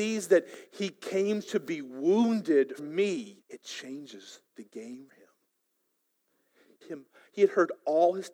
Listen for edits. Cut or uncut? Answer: cut